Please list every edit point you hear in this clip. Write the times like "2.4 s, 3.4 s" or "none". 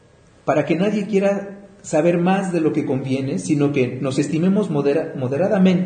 none